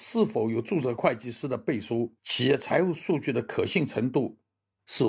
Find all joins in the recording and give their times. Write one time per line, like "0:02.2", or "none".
0:02.2